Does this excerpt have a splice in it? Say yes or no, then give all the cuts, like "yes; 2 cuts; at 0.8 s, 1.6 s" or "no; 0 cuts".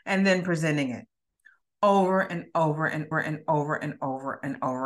yes; 1 cut; at 3.1 s